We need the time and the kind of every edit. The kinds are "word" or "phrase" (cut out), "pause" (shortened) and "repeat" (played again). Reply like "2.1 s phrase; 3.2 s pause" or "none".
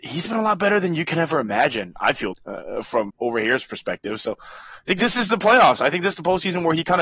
2.3 s word; 3.1 s word